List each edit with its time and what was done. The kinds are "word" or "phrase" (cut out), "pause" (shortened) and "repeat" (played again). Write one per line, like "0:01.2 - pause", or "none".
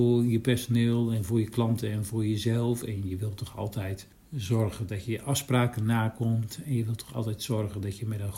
0:04.1 - pause